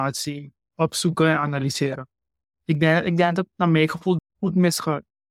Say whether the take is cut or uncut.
cut